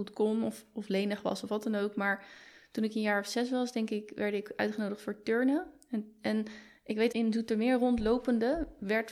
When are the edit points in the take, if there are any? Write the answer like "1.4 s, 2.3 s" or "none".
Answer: 7.1 s